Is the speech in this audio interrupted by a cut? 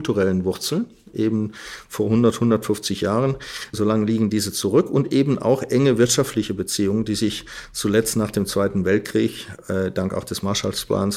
yes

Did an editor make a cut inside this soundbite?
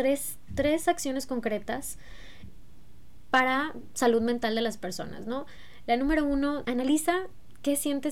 yes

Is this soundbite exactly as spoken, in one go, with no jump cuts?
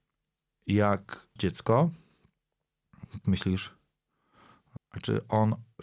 no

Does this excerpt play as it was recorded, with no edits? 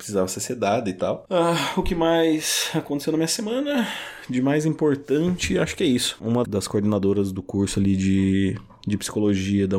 no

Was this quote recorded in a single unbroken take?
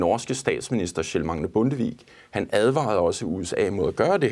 yes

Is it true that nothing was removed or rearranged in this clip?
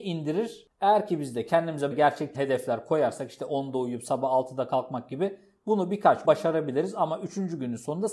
no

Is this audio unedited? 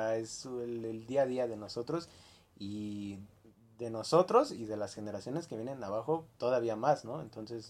yes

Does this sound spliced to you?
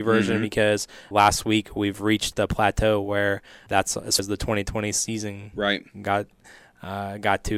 yes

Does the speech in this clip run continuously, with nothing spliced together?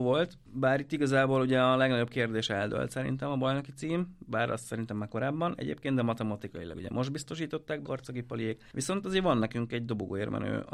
no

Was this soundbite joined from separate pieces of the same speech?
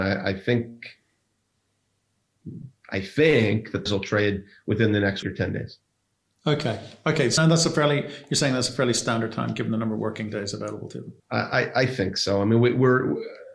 yes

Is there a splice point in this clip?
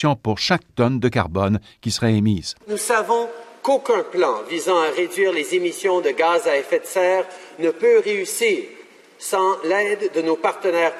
no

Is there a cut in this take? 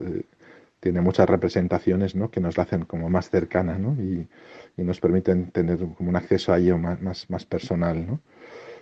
no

